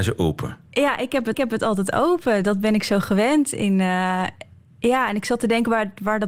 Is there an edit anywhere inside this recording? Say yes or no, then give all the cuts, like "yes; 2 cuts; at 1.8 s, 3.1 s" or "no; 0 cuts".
yes; 1 cut; at 1.3 s